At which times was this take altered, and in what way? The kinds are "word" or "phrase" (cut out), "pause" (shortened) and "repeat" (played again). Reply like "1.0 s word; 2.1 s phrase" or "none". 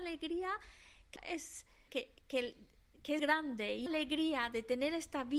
1.2 s word; 1.9 s word; 3.2 s word; 3.9 s word

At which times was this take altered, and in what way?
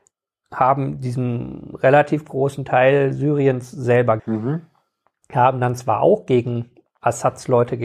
4.2 s word

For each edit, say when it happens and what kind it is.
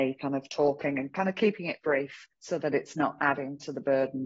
2.3 s pause

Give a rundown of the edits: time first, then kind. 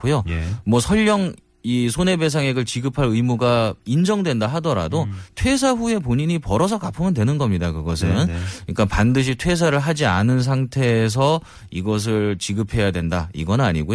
none

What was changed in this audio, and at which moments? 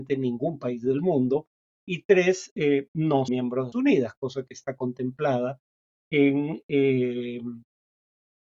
3.3 s word; 3.7 s phrase

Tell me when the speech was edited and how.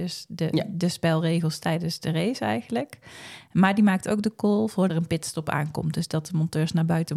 4.9 s phrase

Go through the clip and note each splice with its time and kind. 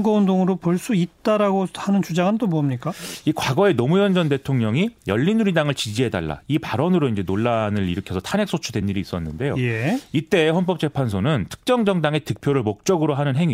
none

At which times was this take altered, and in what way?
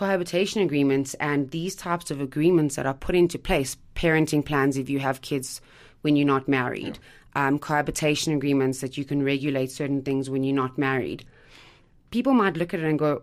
none

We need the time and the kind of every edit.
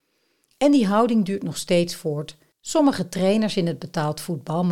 none

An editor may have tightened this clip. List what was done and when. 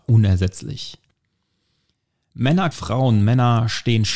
2.7 s word

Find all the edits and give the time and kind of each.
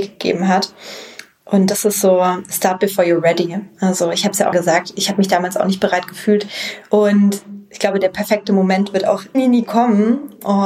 4.5 s word; 9.3 s word

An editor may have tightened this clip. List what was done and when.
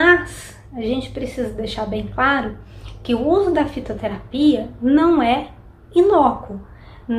none

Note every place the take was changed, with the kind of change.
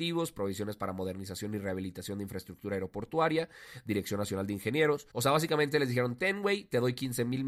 5.1 s pause

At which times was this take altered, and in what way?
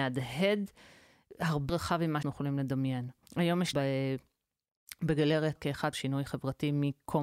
1.7 s word; 2.2 s word; 3.2 s pause; 3.7 s phrase; 5.6 s word; 5.9 s phrase

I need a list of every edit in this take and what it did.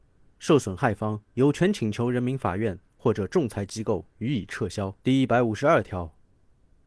1.3 s pause; 4.1 s pause; 5.0 s pause

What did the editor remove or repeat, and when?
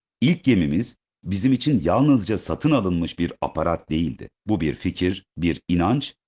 4.4 s pause

